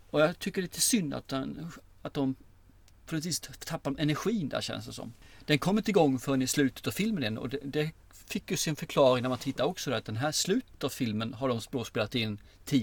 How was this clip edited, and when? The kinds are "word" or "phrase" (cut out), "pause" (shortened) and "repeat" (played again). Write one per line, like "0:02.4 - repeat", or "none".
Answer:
none

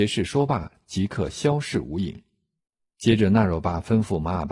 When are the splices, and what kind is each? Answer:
0:02.6 - pause

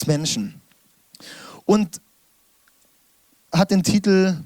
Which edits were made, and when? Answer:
0:03.5 - word

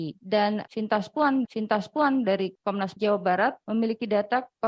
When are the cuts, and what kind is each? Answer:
0:01.4 - repeat
0:03.0 - word

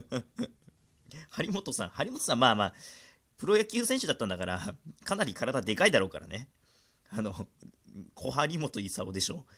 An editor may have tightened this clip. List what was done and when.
none

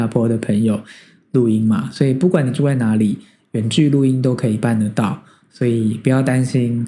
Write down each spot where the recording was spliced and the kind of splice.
none

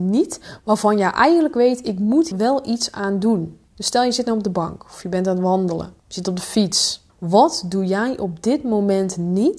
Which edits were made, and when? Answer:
0:02.3 - word
0:03.7 - pause
0:06.0 - pause
0:07.1 - pause

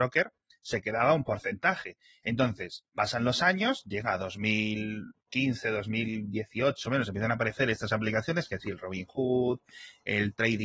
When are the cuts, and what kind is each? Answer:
0:02.9 - pause
0:06.8 - word

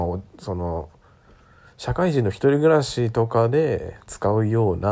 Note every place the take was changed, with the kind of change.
none

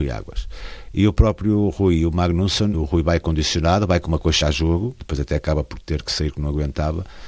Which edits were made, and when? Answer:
0:02.7 - word
0:04.4 - word
0:05.0 - word

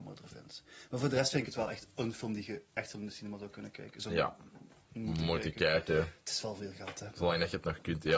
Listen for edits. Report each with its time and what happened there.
none

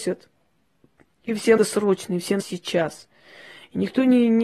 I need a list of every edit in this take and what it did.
0:01.6 - word
0:02.4 - word

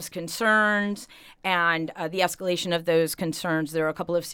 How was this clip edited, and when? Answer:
none

